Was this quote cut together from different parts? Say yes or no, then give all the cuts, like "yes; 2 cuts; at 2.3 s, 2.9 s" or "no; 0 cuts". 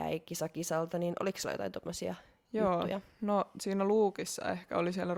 no; 0 cuts